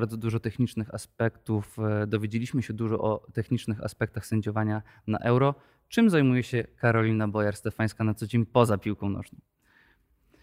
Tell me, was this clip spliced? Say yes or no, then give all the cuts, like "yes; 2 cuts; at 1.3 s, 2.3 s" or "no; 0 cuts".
no; 0 cuts